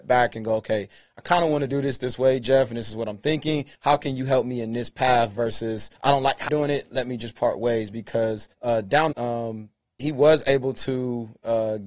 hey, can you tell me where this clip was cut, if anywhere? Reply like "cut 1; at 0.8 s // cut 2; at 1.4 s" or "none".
cut 1; at 3.7 s // cut 2; at 6.0 s // cut 3; at 6.5 s // cut 4; at 8.5 s // cut 5; at 9.1 s // cut 6; at 10.0 s